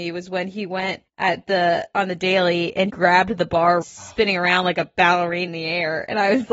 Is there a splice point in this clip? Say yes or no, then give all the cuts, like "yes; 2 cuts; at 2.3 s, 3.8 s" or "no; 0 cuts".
yes; 4 cuts; at 1.1 s, 2.9 s, 3.8 s, 5.5 s